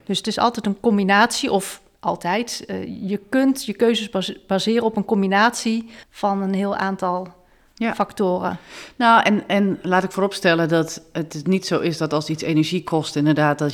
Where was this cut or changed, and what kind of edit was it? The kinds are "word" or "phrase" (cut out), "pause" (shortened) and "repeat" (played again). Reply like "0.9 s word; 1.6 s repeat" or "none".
6.0 s pause

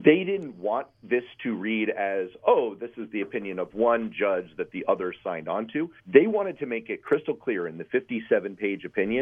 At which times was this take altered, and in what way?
6.0 s pause

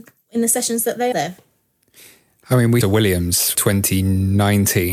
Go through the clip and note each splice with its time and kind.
1.1 s word; 2.8 s phrase; 3.5 s word

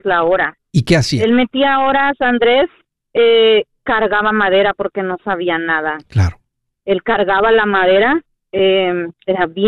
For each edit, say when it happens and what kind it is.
none

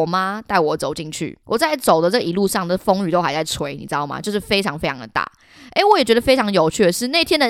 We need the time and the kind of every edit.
1.4 s pause

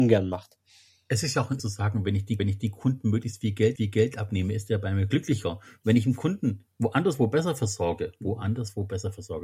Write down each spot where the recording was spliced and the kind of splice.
1.6 s word; 2.4 s repeat; 3.8 s repeat; 6.7 s pause

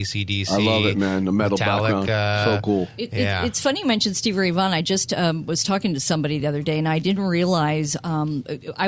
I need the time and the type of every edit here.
none

